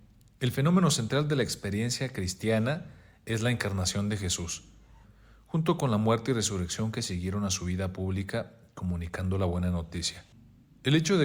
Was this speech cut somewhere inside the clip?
no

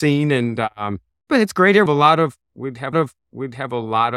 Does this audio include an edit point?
yes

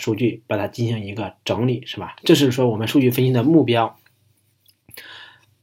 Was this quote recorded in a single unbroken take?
no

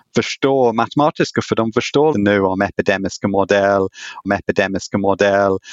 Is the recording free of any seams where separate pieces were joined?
no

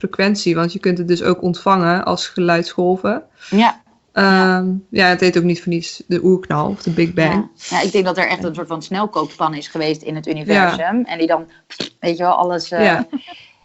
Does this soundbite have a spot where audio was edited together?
no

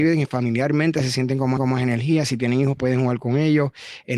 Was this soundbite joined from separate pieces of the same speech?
yes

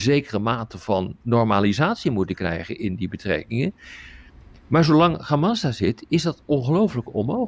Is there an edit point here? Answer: no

